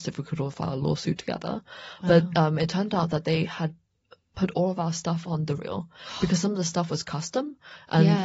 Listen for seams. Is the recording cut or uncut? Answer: cut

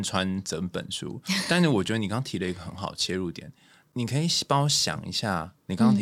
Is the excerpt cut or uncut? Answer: uncut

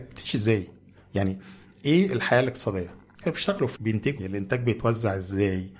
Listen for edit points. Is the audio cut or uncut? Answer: cut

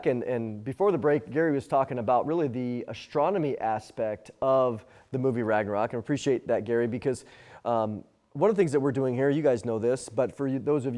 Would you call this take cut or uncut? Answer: uncut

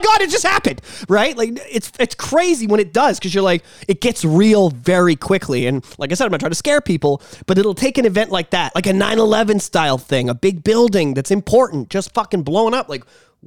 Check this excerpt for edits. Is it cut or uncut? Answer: uncut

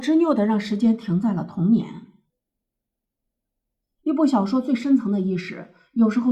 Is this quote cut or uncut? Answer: uncut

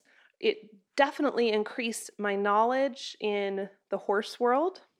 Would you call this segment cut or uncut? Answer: uncut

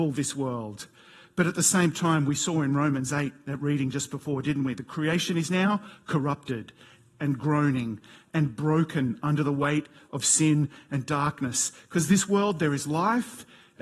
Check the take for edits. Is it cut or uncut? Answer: uncut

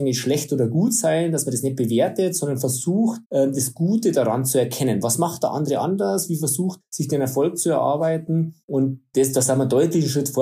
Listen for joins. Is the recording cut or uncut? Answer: cut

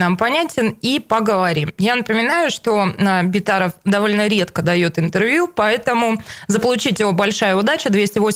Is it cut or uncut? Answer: uncut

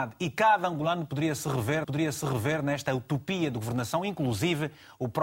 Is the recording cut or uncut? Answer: cut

